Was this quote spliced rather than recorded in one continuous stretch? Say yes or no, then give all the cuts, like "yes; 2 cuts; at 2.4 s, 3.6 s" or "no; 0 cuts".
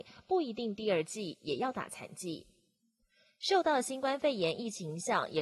no; 0 cuts